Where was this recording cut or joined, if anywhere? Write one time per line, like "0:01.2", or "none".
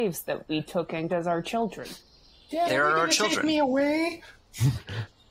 0:01.1
0:02.7